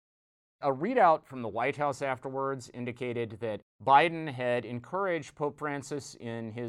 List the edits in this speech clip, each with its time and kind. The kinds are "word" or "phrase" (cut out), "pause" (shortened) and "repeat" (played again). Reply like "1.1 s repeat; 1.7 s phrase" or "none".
3.7 s pause